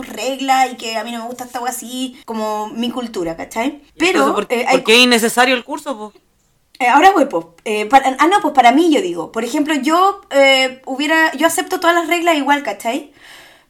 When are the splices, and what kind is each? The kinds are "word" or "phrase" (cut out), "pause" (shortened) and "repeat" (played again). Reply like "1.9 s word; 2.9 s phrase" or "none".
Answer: 2.2 s pause; 3.9 s pause; 6.6 s pause